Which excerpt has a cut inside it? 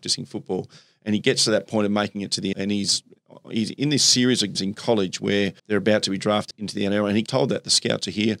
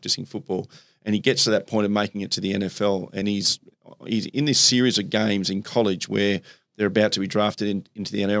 first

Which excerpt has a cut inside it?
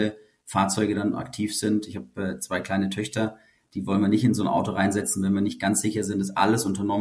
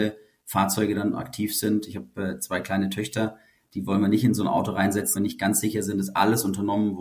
second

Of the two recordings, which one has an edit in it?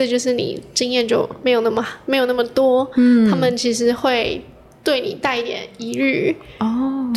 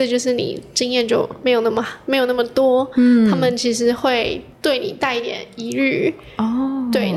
second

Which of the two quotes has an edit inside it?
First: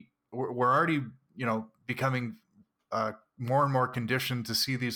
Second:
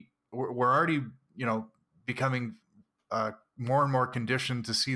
first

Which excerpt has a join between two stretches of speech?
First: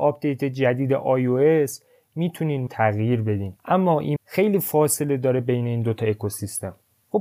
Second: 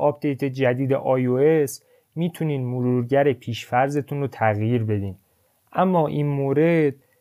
first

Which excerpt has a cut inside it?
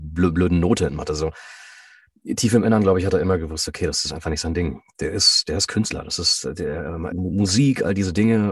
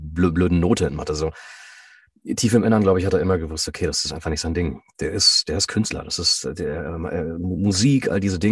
first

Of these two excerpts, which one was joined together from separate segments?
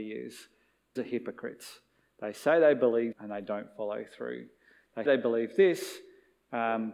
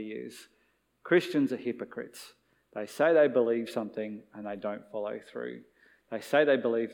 first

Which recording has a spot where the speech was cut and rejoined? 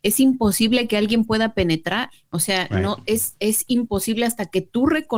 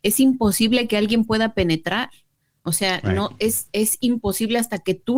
first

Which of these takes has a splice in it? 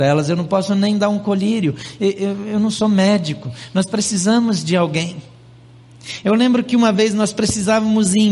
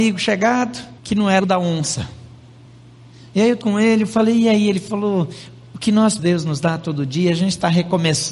second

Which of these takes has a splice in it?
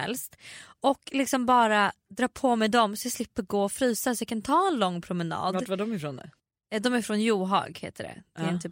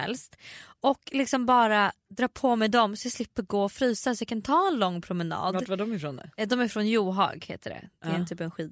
second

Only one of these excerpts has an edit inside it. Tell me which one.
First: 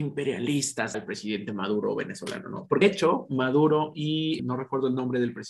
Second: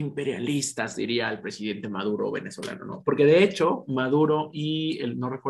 first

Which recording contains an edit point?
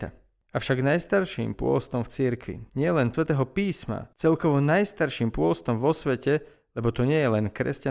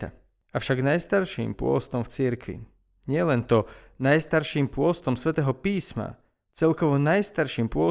first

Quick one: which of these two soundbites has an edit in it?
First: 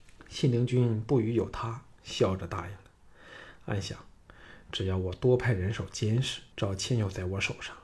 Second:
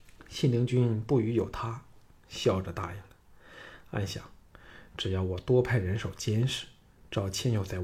first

